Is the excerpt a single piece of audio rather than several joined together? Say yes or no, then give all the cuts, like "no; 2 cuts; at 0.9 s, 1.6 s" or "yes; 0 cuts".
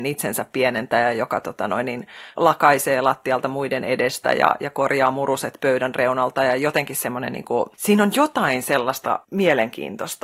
no; 2 cuts; at 7.7 s, 9.2 s